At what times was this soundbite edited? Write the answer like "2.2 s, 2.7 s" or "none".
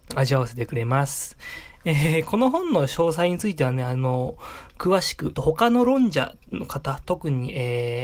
5.3 s